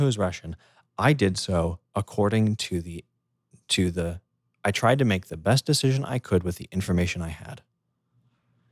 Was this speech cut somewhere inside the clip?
no; 0 cuts

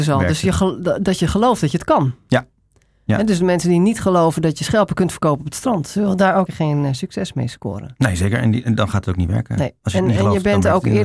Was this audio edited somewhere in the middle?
yes; 1 cut; at 6.5 s

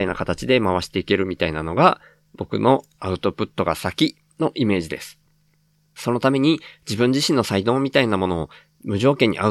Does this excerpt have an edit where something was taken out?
no; 0 cuts

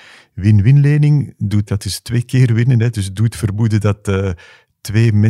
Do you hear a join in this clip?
yes; 1 cut; at 1.7 s

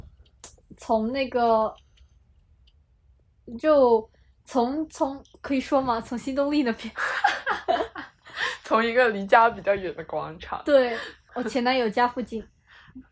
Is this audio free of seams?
no; 1 cut; at 11.3 s

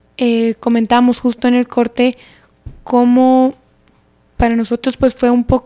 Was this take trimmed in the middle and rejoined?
no; 0 cuts

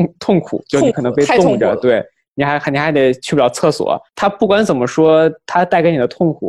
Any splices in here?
no; 0 cuts

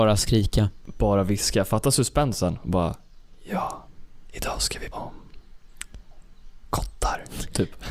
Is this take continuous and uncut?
no; 1 cut; at 4.9 s

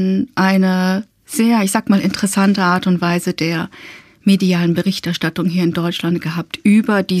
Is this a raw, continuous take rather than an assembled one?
yes; 0 cuts

